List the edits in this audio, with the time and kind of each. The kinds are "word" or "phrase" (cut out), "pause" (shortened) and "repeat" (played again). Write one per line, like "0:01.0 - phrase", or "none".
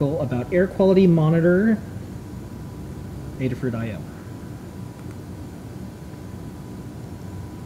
0:03.4 - word